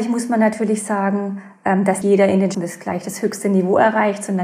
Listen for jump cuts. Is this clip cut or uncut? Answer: cut